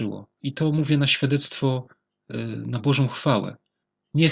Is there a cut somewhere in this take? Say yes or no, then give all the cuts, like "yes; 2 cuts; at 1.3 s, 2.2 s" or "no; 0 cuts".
no; 0 cuts